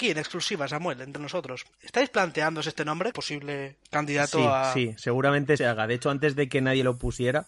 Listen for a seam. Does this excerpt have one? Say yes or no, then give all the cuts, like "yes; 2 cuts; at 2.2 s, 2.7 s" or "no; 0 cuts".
yes; 4 cuts; at 1.7 s, 3.1 s, 3.9 s, 5.6 s